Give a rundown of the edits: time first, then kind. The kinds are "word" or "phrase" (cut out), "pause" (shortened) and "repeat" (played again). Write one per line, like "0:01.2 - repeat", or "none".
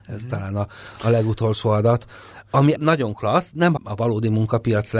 0:02.8 - word
0:03.8 - phrase

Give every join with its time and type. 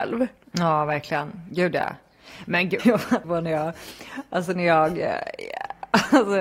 0:02.8 - word
0:03.2 - word

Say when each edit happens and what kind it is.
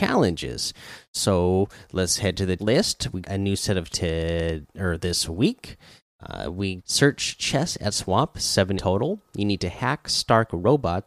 0:02.6 - word
0:03.2 - word
0:03.9 - word
0:06.8 - word
0:07.9 - word
0:08.8 - word

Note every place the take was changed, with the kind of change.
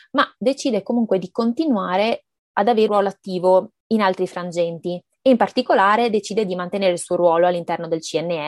0:02.9 - word

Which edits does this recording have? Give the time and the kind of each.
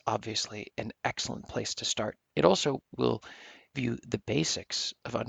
0:02.2 - pause
0:03.7 - word

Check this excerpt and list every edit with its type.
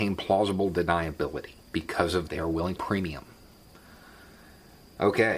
0:01.6 - pause
0:02.3 - word
0:02.8 - phrase

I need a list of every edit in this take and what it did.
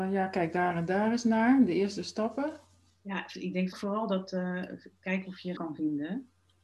0:02.9 - pause
0:03.7 - word
0:05.6 - word

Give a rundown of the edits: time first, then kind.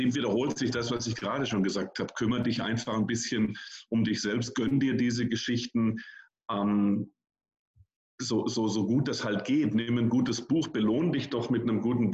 none

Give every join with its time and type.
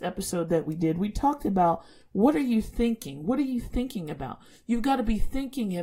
none

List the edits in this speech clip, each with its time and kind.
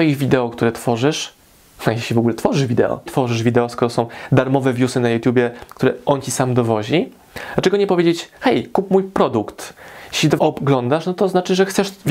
0:03.1 - phrase
0:10.4 - word

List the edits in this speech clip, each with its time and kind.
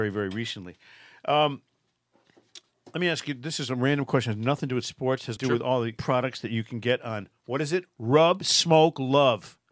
0:05.4 - word
0:06.0 - word

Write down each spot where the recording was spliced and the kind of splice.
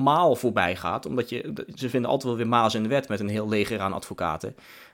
none

